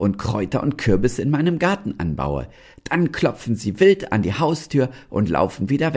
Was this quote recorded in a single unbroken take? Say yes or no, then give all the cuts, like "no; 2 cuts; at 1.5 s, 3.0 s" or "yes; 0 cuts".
yes; 0 cuts